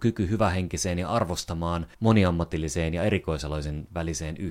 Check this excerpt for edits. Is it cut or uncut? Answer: cut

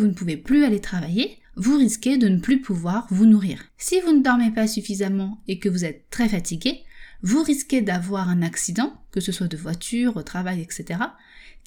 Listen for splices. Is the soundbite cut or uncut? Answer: cut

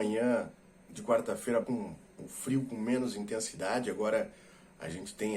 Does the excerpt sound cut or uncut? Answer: cut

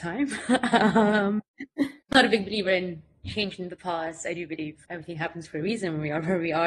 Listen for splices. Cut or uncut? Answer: cut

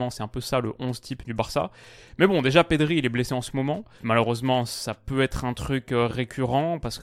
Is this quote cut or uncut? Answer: uncut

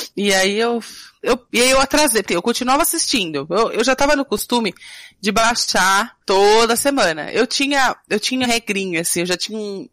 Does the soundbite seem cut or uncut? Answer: cut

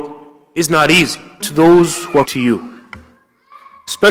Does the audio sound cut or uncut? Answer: cut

